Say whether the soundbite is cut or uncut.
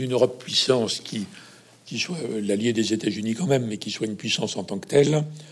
uncut